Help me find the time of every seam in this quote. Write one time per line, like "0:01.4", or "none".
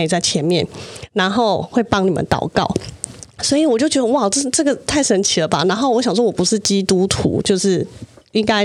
none

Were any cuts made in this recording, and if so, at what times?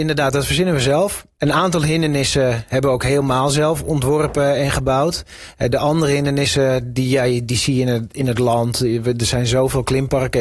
0:01.3

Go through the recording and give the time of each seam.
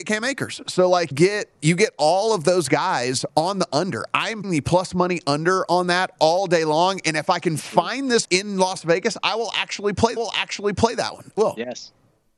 0:01.1
0:03.3
0:04.4
0:08.2
0:10.2
0:11.4

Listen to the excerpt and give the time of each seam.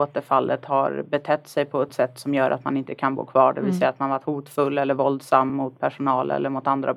none

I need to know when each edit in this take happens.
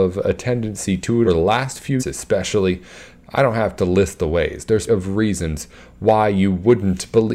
0:01.2
0:02.0
0:04.9

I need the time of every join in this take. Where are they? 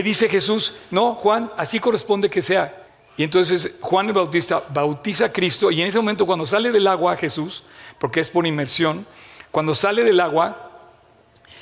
0:02.9

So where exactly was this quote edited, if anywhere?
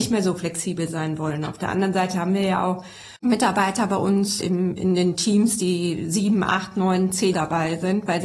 0:03.2
0:04.4
0:07.3

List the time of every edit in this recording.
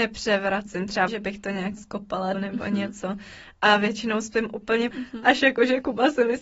0:01.1
0:01.8
0:02.3
0:04.9

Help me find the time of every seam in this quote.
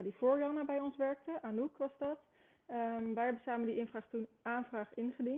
none

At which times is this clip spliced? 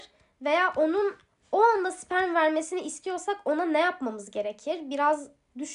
none

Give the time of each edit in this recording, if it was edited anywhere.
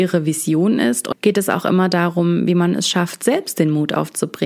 0:01.1

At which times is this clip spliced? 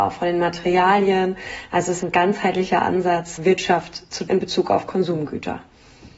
0:02.0
0:03.4
0:04.3

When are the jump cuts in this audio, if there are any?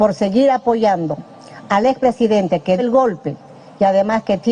0:02.8

